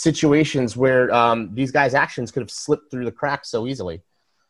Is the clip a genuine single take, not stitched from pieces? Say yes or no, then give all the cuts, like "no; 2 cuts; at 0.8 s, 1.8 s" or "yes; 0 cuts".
yes; 0 cuts